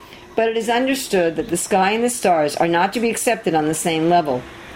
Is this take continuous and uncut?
yes; 0 cuts

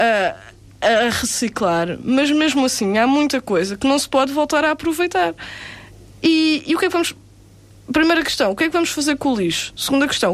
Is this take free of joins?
yes; 0 cuts

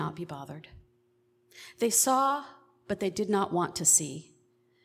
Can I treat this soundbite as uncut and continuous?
yes; 0 cuts

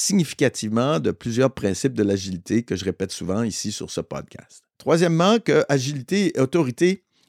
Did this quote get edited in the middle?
yes; 1 cut; at 4.7 s

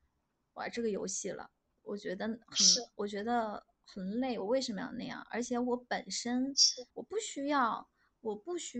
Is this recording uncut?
no; 2 cuts; at 1.7 s, 6.9 s

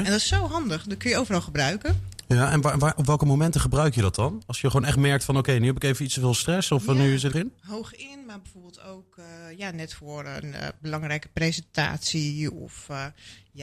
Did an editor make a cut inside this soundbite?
yes; 1 cut; at 7.3 s

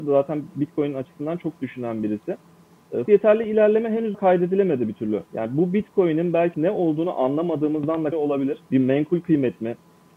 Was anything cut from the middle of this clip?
yes; 7 cuts; at 1.6 s, 3.1 s, 4.1 s, 5.3 s, 6.5 s, 8.1 s, 8.7 s

